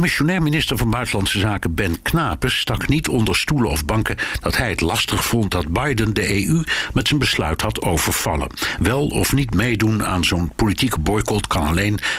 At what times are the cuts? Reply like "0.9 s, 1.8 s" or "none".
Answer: none

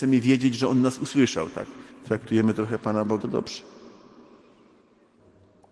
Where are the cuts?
1.9 s, 3.2 s

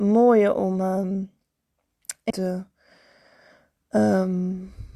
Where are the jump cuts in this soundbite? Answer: 2.3 s

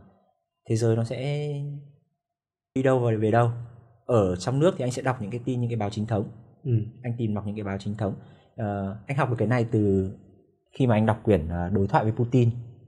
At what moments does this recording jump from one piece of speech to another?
2.8 s

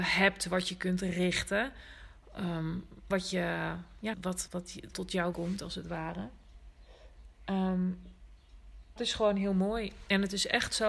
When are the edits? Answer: 3.1 s, 4.1 s, 4.5 s, 4.9 s, 5.3 s, 9.0 s

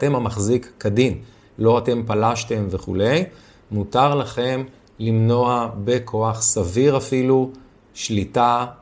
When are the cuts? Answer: none

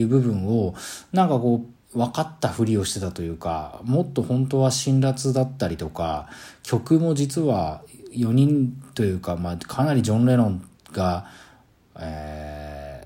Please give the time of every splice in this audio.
1.8 s

